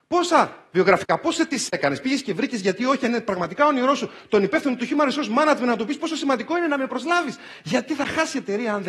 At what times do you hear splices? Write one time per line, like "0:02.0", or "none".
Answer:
none